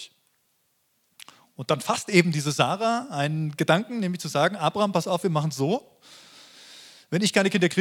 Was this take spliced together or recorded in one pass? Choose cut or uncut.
uncut